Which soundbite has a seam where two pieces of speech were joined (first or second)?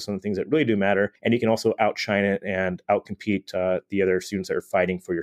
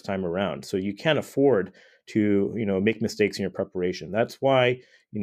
first